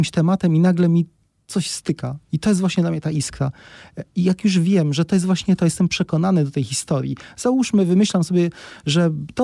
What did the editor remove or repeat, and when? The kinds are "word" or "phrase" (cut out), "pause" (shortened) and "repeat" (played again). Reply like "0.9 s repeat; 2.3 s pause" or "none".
none